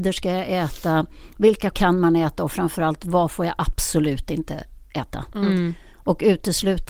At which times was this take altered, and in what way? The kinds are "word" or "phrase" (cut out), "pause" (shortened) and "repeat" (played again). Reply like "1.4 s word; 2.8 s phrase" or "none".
1.7 s word